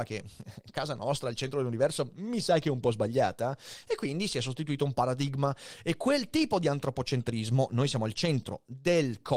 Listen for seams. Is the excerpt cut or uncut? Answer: uncut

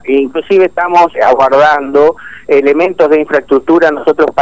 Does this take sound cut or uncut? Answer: cut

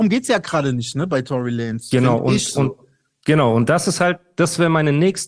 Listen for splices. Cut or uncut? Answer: uncut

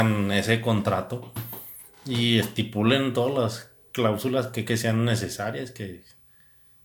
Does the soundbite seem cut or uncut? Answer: cut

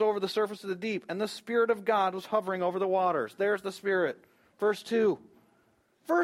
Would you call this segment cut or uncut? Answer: uncut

